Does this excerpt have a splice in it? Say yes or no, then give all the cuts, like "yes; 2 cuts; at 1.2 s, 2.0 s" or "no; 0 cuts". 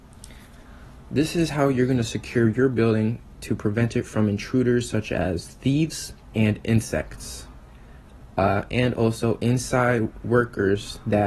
yes; 1 cut; at 6.2 s